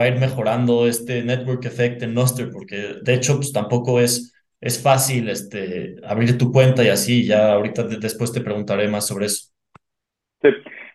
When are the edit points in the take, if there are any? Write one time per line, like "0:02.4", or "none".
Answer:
none